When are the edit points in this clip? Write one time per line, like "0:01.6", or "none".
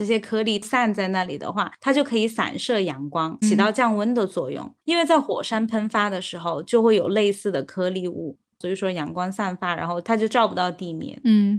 0:03.4